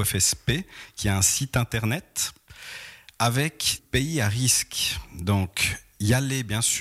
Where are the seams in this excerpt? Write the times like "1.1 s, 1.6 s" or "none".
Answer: 3.8 s